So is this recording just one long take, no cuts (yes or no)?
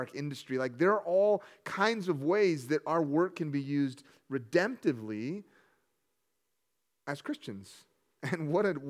yes